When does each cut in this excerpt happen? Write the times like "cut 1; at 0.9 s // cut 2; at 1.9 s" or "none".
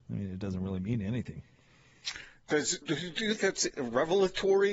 cut 1; at 2.8 s // cut 2; at 3.4 s // cut 3; at 3.7 s